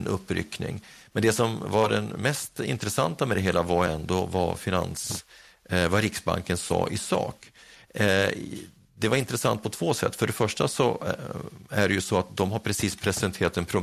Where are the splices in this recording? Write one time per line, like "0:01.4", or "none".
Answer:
none